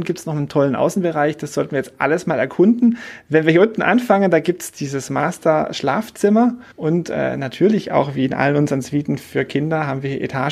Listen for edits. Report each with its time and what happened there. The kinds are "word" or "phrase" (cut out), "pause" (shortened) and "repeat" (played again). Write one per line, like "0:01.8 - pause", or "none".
0:06.7 - pause